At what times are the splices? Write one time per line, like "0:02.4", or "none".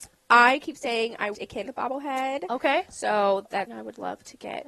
0:01.3
0:01.7
0:03.7